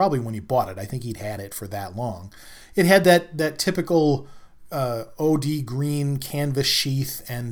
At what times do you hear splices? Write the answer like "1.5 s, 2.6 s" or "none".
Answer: none

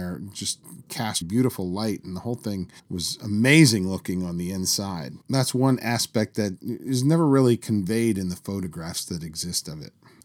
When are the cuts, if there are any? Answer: 1.2 s, 2.8 s, 5.2 s

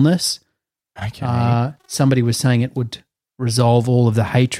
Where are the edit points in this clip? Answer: 1.8 s

